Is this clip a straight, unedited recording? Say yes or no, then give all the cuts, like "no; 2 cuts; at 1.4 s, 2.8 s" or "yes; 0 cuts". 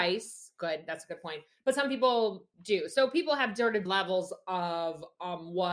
no; 2 cuts; at 2.5 s, 3.9 s